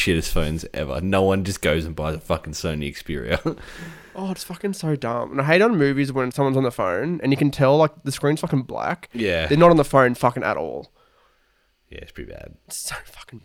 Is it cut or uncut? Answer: cut